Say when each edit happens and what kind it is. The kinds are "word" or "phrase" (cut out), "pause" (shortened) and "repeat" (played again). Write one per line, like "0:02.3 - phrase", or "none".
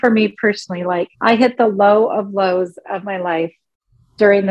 0:01.1 - pause